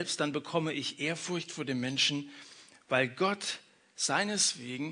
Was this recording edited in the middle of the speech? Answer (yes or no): no